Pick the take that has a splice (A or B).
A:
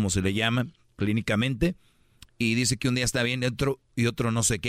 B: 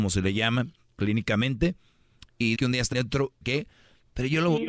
B